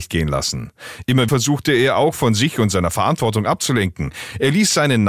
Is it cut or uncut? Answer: cut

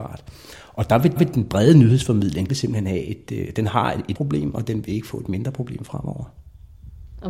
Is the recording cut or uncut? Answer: cut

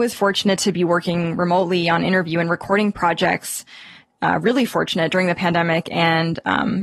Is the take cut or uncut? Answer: uncut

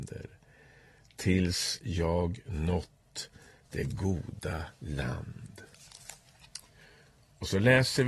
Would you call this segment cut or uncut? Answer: uncut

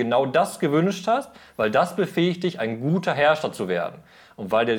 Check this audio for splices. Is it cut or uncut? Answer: uncut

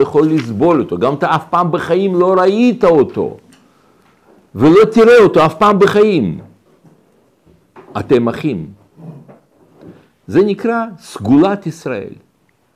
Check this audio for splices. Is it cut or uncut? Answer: uncut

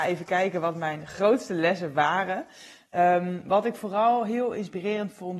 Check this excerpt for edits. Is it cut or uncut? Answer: uncut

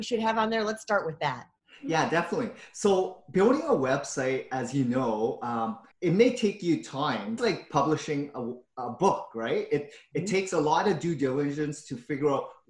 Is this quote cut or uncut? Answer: cut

